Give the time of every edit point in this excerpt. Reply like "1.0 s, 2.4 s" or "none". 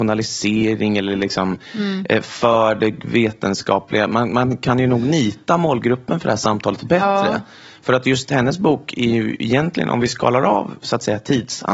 none